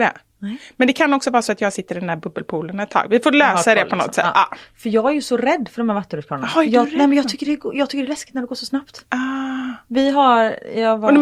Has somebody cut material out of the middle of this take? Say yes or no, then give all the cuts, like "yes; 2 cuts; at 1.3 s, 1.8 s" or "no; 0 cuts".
no; 0 cuts